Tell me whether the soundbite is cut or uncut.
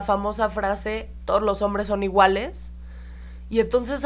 uncut